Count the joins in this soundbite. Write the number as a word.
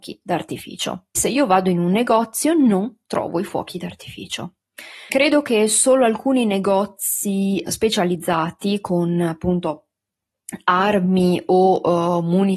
three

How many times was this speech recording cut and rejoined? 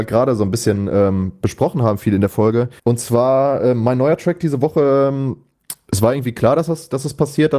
one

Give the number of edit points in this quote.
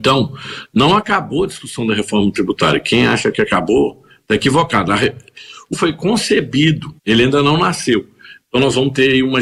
two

